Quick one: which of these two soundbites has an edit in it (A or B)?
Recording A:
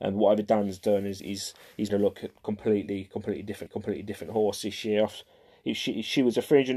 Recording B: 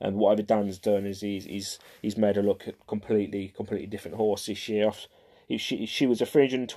A